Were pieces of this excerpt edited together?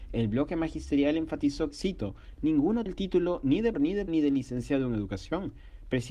yes; 4 cuts; at 1.7 s, 2.9 s, 3.7 s, 4.1 s

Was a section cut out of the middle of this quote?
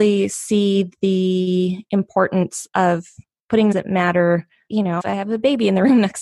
yes; 3 cuts; at 3.7 s, 4.7 s, 5.0 s

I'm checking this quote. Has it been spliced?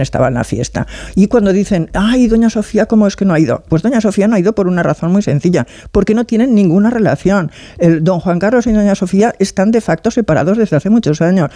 no; 0 cuts

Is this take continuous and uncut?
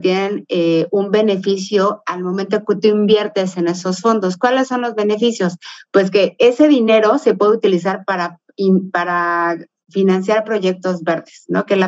yes; 0 cuts

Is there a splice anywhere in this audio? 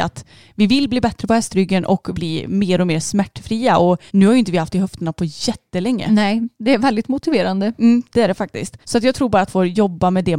yes; 5 cuts; at 2.1 s, 4.1 s, 4.7 s, 8.8 s, 9.5 s

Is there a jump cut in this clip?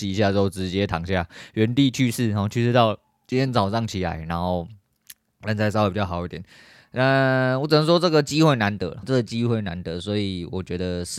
yes; 1 cut; at 9.0 s

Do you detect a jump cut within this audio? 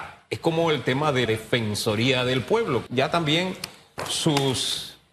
yes; 2 cuts; at 1.3 s, 2.9 s

